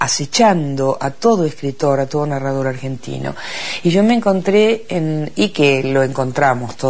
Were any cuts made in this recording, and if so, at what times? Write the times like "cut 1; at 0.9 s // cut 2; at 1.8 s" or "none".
none